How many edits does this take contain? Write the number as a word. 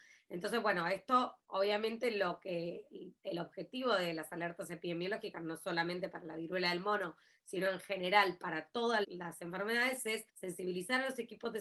three